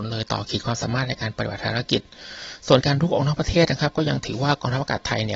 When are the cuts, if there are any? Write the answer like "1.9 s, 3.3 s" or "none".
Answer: none